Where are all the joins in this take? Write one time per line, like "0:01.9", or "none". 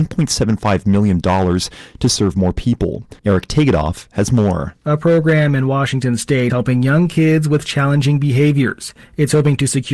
0:03.2
0:04.8
0:06.5